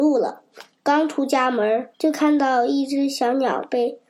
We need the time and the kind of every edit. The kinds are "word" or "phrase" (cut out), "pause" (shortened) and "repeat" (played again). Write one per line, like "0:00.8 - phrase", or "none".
0:01.9 - pause